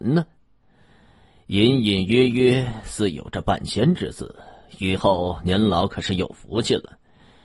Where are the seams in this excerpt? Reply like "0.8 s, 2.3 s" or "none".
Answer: none

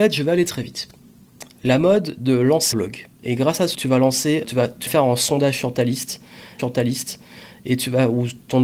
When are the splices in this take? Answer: 2.7 s, 3.1 s, 3.7 s, 4.4 s, 4.9 s, 6.6 s

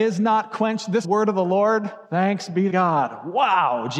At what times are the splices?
1.0 s, 2.1 s, 2.7 s

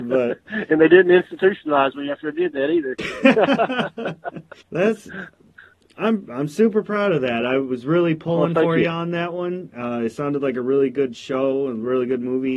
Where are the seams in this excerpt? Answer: 4.6 s

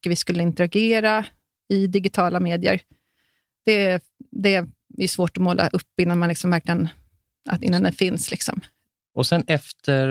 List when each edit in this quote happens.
none

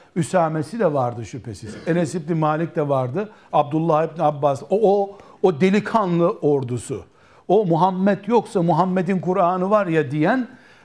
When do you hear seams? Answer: none

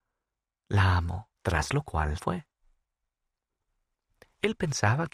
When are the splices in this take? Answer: 1.4 s, 2.2 s

